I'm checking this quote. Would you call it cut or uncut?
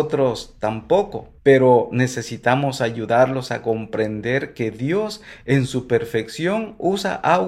cut